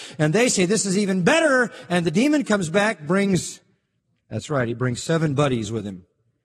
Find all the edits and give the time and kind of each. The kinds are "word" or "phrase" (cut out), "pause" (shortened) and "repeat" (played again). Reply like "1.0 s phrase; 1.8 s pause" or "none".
4.0 s pause

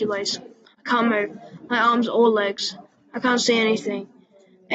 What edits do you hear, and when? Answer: none

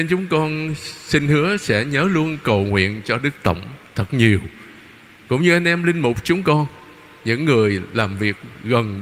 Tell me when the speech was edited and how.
none

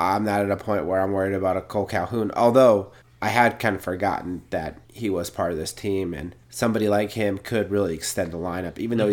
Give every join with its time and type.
3.0 s pause; 4.8 s pause; 6.4 s pause

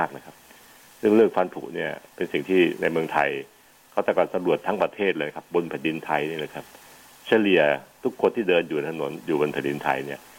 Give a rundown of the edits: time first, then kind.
2.1 s pause

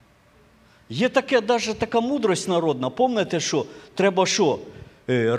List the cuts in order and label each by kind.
none

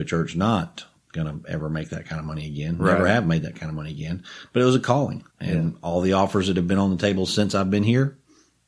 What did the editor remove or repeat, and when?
5.3 s pause

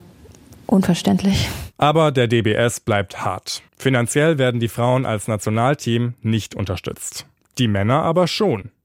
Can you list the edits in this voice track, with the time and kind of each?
1.7 s pause; 3.7 s pause; 7.4 s pause

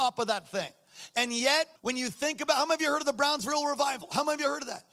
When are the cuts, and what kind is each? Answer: 1.8 s pause

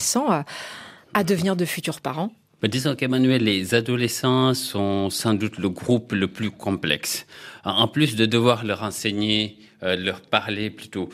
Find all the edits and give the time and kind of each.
none

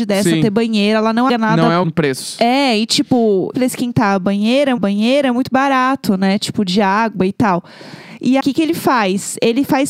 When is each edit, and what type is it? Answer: 1.3 s word; 1.8 s word; 3.5 s phrase; 4.8 s repeat; 8.4 s phrase

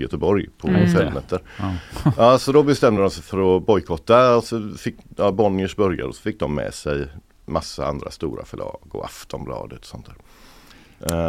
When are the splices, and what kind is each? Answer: none

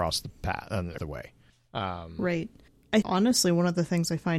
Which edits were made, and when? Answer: 1.0 s word; 3.0 s word

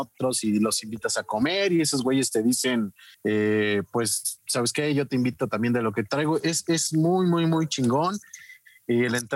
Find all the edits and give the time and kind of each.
3.1 s pause

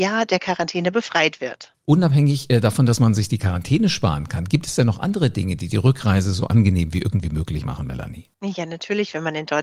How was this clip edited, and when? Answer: 8.3 s pause

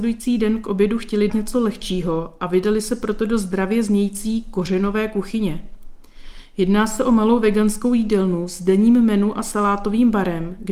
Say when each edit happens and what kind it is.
1.3 s word

